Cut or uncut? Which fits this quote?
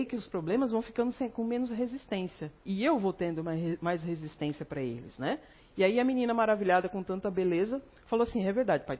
cut